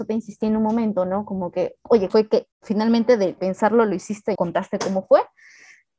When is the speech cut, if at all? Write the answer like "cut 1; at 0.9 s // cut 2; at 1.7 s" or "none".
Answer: cut 1; at 2.1 s // cut 2; at 2.5 s // cut 3; at 3.4 s // cut 4; at 4.4 s